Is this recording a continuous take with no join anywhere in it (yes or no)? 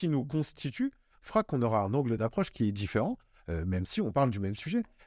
yes